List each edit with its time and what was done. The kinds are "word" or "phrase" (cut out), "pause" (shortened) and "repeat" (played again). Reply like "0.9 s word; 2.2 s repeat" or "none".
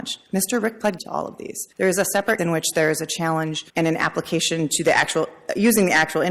1.0 s word; 1.7 s pause; 2.4 s word; 3.7 s pause